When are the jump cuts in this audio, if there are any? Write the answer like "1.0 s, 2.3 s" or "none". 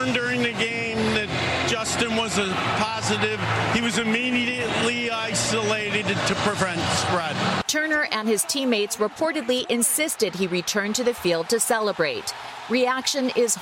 none